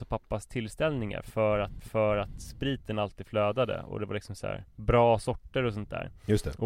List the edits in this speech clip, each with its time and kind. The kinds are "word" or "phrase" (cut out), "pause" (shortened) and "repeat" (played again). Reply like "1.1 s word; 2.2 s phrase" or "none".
1.8 s repeat; 4.7 s pause